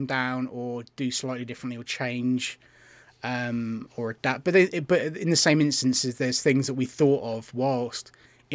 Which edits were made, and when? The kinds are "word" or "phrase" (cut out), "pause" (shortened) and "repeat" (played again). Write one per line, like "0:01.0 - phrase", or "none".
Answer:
none